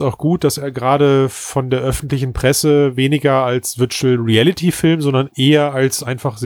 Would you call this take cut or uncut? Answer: uncut